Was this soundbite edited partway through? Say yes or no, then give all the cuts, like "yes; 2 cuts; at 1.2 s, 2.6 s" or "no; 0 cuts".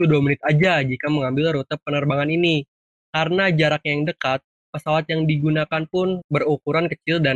no; 0 cuts